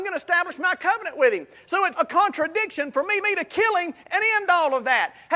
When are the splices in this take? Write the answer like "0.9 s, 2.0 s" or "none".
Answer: 1.9 s, 3.2 s